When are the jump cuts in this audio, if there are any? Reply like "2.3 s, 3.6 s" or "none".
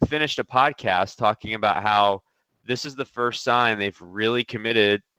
none